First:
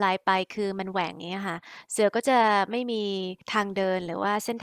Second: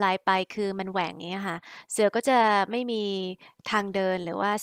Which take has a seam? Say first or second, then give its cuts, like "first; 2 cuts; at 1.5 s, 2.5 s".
first; 1 cut; at 3.4 s